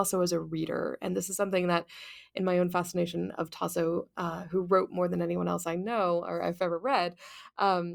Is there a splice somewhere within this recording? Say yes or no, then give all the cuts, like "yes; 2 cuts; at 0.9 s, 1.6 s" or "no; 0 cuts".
no; 0 cuts